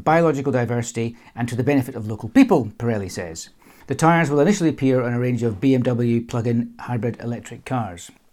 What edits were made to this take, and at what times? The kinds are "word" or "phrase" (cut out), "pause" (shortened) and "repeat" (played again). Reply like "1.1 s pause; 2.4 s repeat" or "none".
none